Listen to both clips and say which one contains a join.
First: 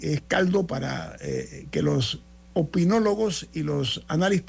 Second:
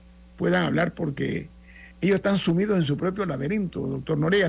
second; 1 cut; at 1.9 s

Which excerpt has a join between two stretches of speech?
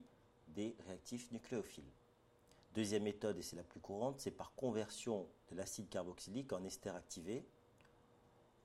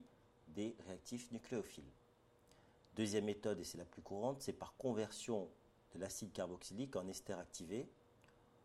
first; 2 cuts; at 2.6 s, 5.4 s

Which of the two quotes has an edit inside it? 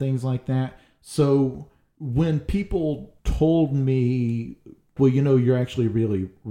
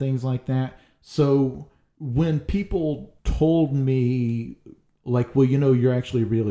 first; 1 cut; at 5.0 s

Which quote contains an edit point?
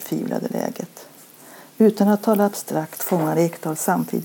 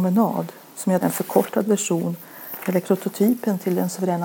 second; 2 cuts; at 1.0 s, 2.8 s

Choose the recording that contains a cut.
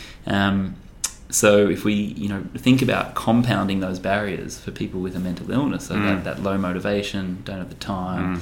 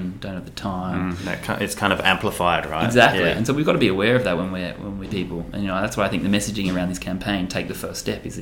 second; 1 cut; at 5.1 s

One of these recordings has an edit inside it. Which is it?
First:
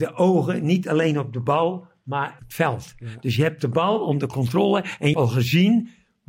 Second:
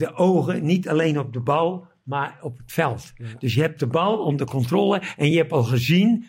first; 2 cuts; at 2.4 s, 5.1 s

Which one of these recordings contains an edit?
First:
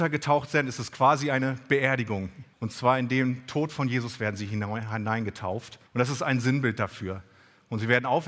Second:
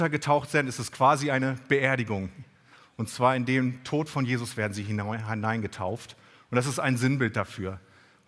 first; 2 cuts; at 2.5 s, 5.9 s

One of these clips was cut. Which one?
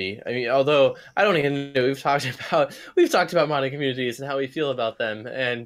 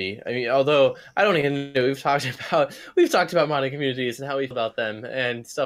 second; 1 cut; at 4.5 s

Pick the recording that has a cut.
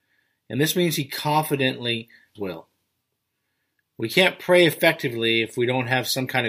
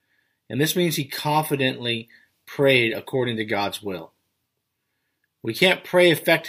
first; 1 cut; at 2.4 s

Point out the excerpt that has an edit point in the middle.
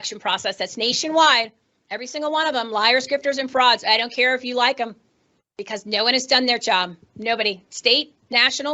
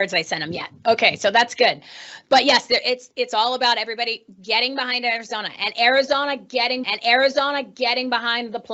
second; 1 cut; at 6.8 s

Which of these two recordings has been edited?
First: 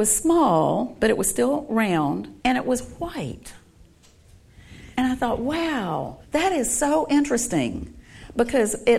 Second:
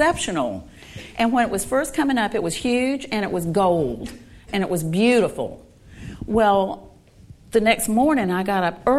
first; 3 cuts; at 2.4 s, 4.9 s, 6.2 s

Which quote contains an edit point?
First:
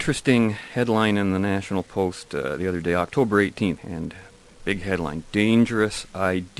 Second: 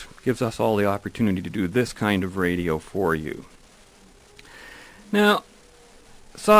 first; 1 cut; at 3.8 s

